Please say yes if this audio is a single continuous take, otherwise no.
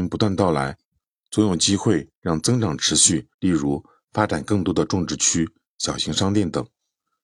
no